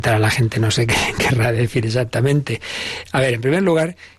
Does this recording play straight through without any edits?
yes; 0 cuts

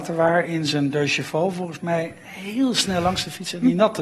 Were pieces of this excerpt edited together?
no; 0 cuts

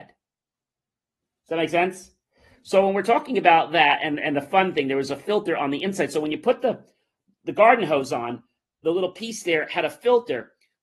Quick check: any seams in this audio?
no; 0 cuts

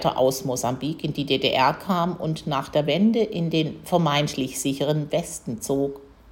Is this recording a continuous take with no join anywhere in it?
yes; 0 cuts

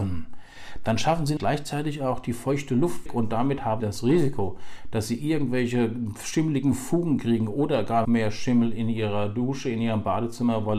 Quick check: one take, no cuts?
no; 4 cuts; at 1.4 s, 3.1 s, 3.8 s, 8.0 s

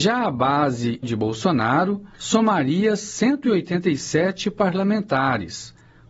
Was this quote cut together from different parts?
yes; 2 cuts; at 1.0 s, 2.1 s

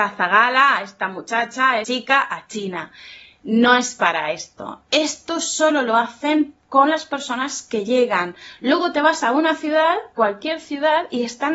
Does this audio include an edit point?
yes; 2 cuts; at 1.8 s, 10.2 s

